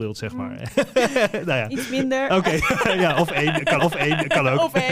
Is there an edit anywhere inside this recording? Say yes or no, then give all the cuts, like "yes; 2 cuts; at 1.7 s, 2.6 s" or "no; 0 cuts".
yes; 1 cut; at 3.8 s